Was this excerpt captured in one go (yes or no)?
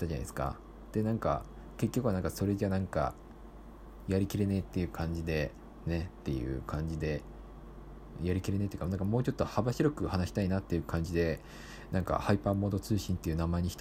yes